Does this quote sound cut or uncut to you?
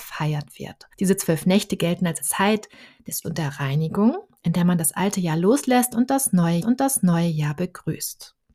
cut